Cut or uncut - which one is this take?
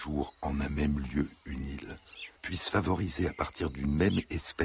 cut